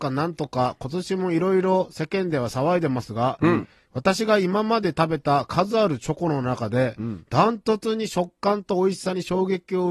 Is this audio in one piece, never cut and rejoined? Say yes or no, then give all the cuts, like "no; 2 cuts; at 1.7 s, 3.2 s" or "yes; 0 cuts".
yes; 0 cuts